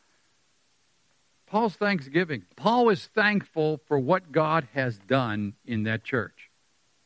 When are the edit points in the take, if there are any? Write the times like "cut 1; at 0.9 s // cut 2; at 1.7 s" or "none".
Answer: cut 1; at 2.5 s